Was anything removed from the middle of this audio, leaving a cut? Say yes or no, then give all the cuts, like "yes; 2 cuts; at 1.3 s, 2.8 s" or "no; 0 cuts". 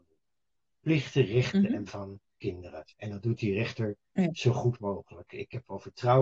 yes; 2 cuts; at 1.9 s, 2.9 s